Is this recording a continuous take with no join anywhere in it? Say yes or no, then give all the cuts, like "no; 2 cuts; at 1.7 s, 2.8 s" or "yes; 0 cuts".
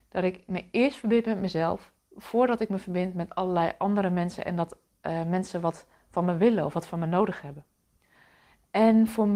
yes; 0 cuts